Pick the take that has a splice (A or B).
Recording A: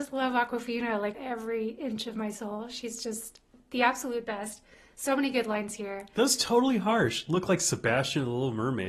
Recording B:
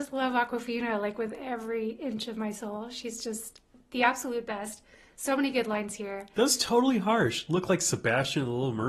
A